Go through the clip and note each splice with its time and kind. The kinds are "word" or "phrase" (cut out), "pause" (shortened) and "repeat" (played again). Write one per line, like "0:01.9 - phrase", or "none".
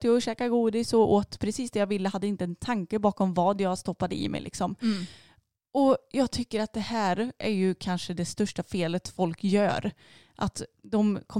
none